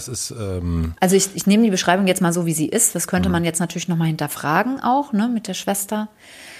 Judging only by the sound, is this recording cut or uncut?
uncut